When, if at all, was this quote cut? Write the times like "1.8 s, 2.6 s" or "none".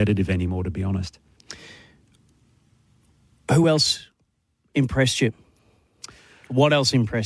none

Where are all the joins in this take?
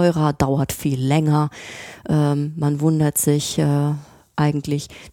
none

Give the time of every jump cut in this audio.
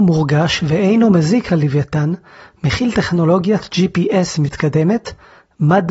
none

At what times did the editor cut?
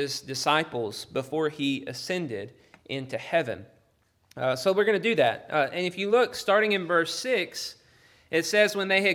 none

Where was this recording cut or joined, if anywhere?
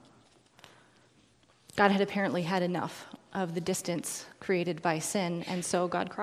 none

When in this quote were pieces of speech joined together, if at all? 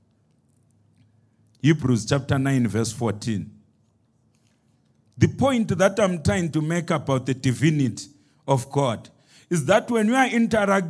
none

